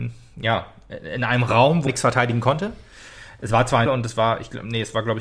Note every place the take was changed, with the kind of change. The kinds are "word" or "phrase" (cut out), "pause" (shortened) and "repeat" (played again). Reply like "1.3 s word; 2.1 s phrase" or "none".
1.9 s word; 3.9 s phrase